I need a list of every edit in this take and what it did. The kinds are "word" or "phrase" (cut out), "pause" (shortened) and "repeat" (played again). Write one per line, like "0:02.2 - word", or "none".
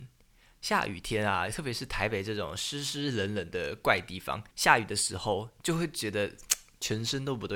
0:04.5 - pause